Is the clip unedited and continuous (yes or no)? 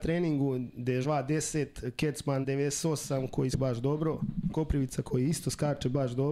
no